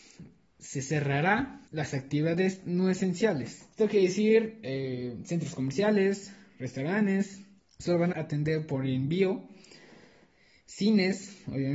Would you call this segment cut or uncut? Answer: cut